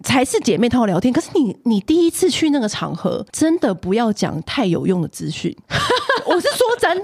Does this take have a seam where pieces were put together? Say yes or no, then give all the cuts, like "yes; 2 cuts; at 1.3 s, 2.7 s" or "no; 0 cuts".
yes; 1 cut; at 3.3 s